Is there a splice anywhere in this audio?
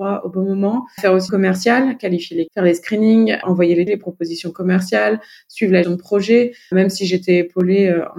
yes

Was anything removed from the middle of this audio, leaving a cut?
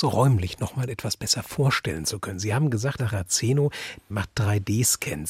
yes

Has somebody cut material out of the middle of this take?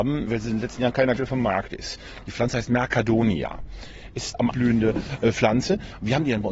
yes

